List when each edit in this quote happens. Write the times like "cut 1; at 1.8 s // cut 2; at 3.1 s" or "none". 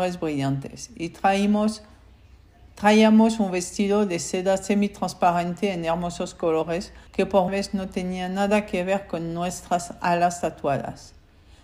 cut 1; at 7.1 s // cut 2; at 7.5 s